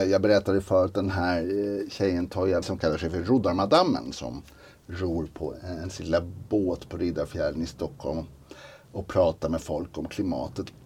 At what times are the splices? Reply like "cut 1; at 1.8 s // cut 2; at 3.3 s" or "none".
cut 1; at 2.6 s